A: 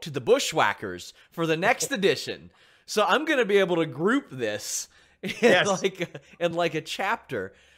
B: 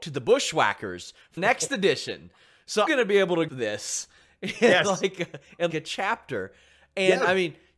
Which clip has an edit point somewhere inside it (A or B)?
B